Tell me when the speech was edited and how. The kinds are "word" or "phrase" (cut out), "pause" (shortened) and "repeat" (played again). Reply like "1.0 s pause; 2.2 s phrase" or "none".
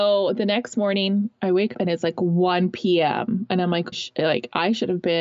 1.7 s word; 3.9 s phrase